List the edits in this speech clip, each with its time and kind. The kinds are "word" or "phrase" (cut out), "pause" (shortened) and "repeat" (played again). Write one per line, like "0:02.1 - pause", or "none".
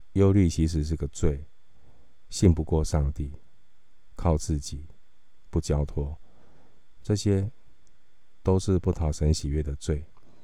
none